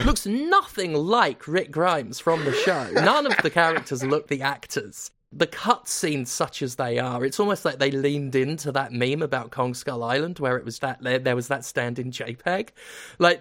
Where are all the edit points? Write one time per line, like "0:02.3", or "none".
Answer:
0:04.3
0:10.8

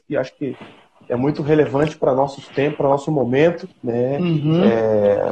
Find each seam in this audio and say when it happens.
0:03.7

